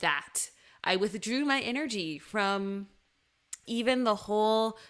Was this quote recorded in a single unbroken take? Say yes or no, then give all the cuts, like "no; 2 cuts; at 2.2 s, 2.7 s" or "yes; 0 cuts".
no; 1 cut; at 3.7 s